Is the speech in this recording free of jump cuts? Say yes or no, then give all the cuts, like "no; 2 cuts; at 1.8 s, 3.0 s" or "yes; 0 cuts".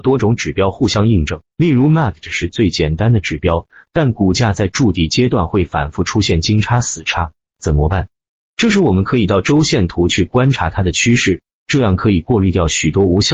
no; 1 cut; at 1.5 s